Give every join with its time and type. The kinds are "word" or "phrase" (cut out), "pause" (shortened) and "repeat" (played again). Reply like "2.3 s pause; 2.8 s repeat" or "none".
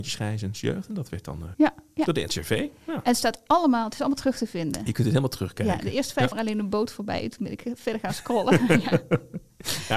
1.5 s word; 6.3 s phrase